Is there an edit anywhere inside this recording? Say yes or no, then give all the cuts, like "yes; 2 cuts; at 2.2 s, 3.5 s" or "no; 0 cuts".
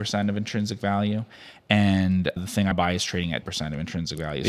yes; 3 cuts; at 2.4 s, 2.7 s, 3.4 s